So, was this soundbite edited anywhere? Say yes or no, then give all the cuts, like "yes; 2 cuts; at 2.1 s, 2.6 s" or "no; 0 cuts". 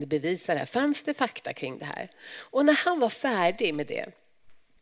no; 0 cuts